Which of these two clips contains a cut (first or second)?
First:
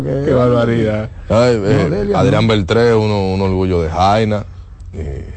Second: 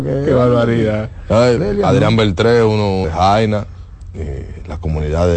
second